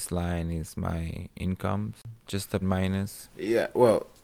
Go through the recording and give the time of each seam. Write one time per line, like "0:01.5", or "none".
0:02.2
0:02.6